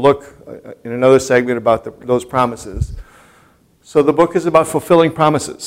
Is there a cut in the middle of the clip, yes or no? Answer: no